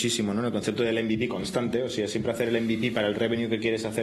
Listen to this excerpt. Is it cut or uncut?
uncut